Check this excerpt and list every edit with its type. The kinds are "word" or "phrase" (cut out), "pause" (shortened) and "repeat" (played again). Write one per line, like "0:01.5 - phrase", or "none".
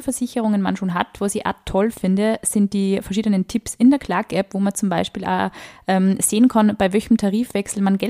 none